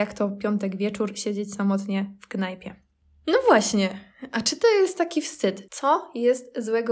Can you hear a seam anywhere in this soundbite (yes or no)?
no